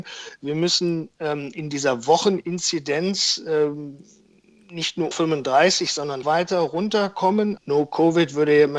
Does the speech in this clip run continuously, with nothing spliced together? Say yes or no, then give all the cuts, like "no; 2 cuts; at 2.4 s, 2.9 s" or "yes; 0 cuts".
no; 3 cuts; at 5.1 s, 6.2 s, 7.6 s